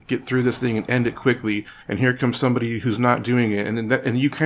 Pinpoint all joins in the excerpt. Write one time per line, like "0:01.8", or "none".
0:01.8